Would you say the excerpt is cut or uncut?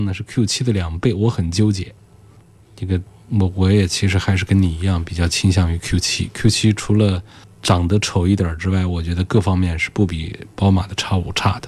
uncut